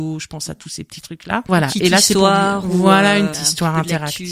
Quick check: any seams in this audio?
yes; 1 cut; at 3.3 s

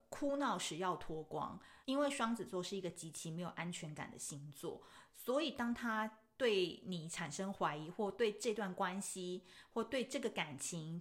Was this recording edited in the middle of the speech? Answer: yes; 1 cut; at 1.8 s

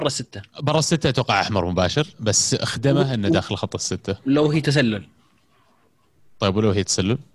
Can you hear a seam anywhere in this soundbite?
yes; 1 cut; at 2.1 s

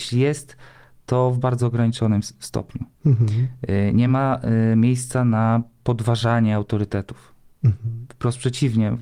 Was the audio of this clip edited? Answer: no; 0 cuts

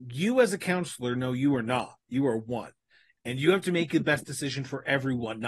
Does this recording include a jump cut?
no; 0 cuts

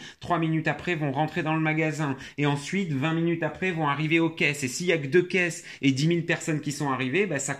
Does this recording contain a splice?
no; 0 cuts

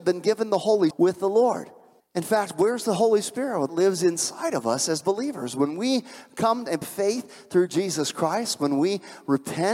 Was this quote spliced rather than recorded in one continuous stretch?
yes; 4 cuts; at 0.9 s, 2.0 s, 3.7 s, 6.8 s

